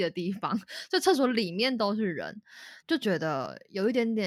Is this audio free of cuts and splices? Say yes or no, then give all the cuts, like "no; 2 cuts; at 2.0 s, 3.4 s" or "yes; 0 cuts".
no; 1 cut; at 2.8 s